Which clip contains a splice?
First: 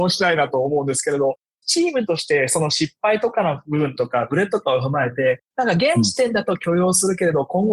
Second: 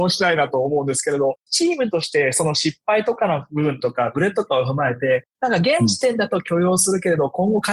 second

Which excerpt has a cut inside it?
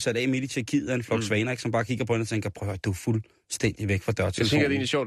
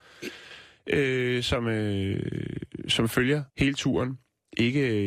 second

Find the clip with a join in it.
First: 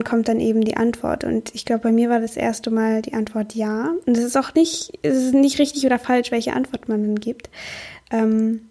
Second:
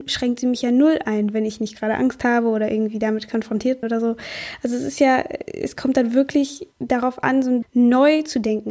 second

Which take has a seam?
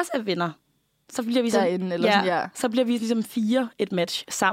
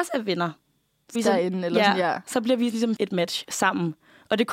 second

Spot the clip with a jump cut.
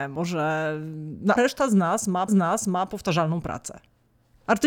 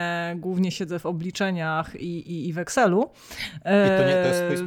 first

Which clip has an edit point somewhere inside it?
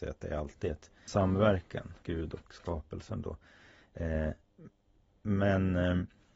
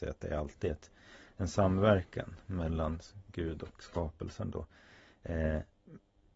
first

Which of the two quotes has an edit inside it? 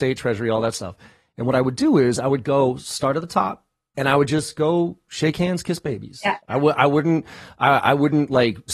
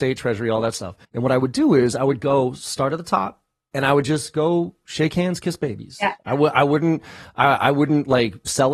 second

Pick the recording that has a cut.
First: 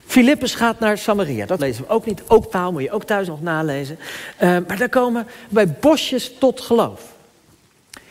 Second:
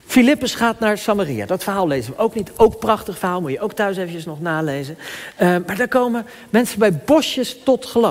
first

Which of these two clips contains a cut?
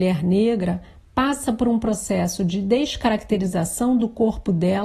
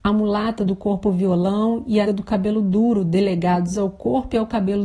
second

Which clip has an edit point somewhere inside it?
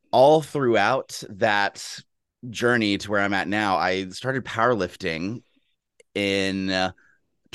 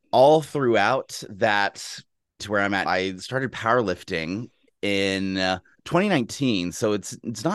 second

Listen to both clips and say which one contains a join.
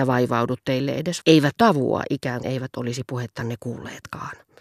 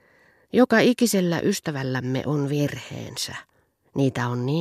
first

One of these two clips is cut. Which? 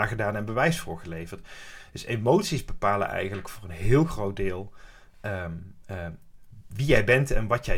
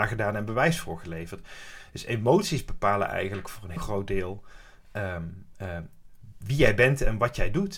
second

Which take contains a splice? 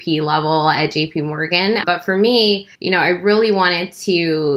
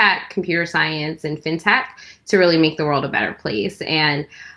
first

